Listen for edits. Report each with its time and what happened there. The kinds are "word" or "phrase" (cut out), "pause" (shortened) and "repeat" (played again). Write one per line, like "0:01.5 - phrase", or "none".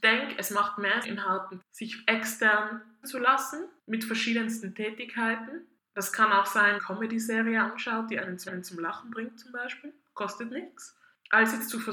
0:01.0 - word
0:01.6 - word
0:03.0 - word
0:03.8 - pause
0:06.8 - phrase
0:08.5 - repeat